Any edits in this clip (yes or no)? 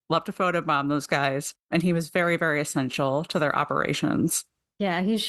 yes